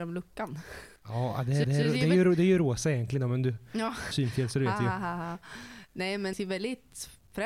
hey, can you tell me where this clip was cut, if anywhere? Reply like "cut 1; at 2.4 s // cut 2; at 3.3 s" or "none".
cut 1; at 1.0 s // cut 2; at 1.6 s // cut 3; at 4.1 s // cut 4; at 6.3 s